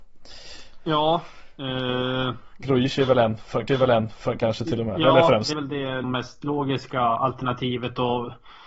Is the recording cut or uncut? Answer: cut